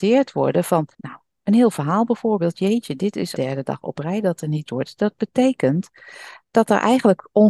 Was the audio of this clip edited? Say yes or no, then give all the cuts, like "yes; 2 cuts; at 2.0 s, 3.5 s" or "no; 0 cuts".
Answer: yes; 3 cuts; at 0.9 s, 3.3 s, 4.7 s